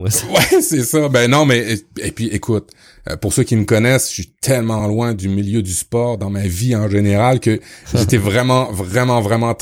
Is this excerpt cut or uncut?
uncut